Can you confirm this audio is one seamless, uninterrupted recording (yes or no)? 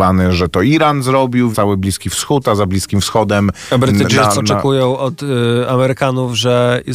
no